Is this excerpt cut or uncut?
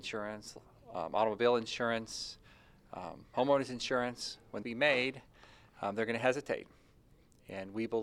cut